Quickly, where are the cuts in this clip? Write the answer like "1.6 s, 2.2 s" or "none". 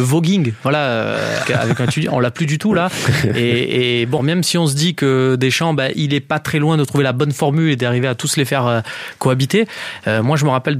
1.4 s, 4.2 s